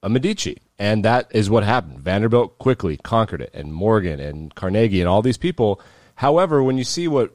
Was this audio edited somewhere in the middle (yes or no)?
no